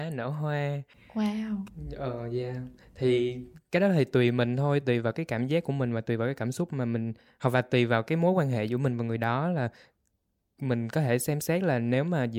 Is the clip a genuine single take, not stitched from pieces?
yes; 0 cuts

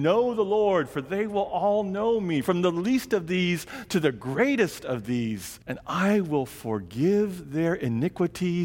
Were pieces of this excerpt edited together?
yes; 1 cut; at 5.6 s

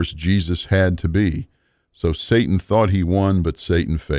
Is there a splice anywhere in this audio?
no; 0 cuts

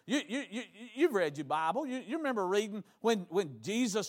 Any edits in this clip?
no; 0 cuts

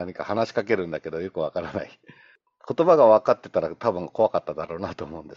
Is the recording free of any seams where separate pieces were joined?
yes; 0 cuts

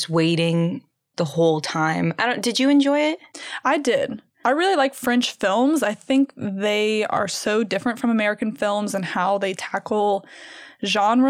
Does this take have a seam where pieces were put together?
no; 0 cuts

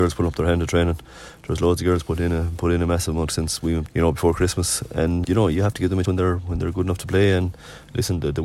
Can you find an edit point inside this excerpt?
yes; 4 cuts; at 3.3 s, 3.9 s, 5.2 s, 6.0 s

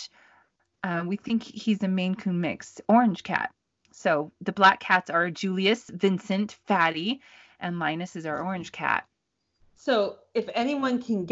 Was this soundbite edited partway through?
no; 0 cuts

